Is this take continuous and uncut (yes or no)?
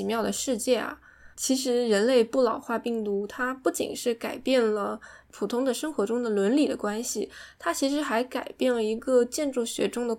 no